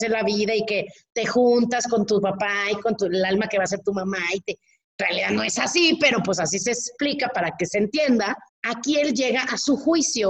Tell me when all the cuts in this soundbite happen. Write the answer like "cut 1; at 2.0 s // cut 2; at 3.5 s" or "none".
cut 1; at 5.0 s // cut 2; at 8.5 s